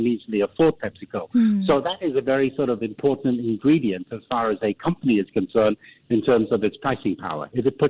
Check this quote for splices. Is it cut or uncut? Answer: uncut